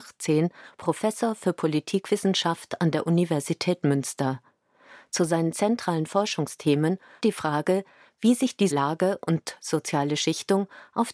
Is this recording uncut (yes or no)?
no